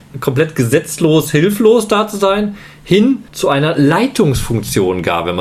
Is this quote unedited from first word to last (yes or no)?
no